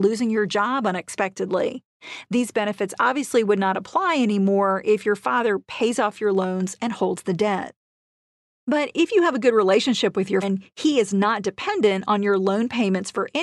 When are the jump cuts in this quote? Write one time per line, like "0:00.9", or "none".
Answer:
0:10.4